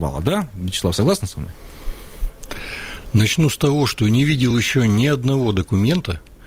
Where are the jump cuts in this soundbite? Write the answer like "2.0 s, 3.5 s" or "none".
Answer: none